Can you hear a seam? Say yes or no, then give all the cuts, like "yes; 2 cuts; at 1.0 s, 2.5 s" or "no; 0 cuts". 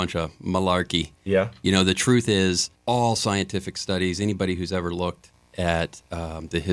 no; 0 cuts